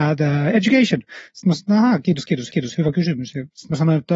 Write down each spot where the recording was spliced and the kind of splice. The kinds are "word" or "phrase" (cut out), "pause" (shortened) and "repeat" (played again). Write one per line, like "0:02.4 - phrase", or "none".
0:02.5 - repeat